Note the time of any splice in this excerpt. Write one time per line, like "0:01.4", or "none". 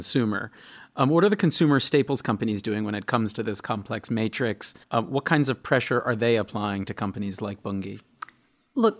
0:04.8